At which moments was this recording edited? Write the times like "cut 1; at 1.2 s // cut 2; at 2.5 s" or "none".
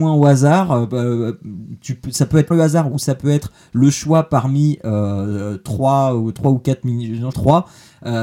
cut 1; at 2.5 s // cut 2; at 7.3 s